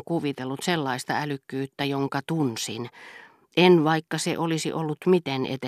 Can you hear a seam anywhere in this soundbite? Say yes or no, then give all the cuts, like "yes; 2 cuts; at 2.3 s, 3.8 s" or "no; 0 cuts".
no; 0 cuts